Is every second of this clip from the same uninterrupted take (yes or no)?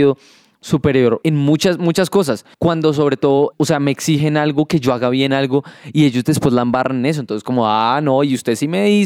no